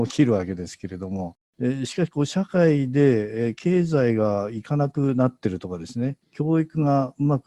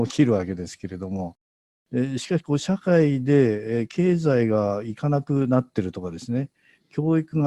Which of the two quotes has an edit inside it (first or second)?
first